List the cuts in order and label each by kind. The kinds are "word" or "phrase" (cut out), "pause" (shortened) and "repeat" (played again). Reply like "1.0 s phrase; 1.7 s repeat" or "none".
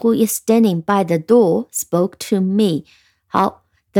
none